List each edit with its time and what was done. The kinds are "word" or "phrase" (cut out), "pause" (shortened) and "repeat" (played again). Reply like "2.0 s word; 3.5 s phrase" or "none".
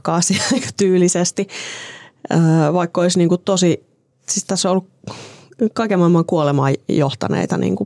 4.1 s pause